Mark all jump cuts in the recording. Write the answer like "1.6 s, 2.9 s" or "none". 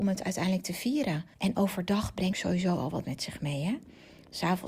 1.3 s, 2.3 s, 3.0 s